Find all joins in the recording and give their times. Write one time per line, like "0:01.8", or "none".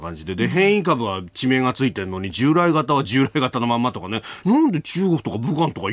0:04.4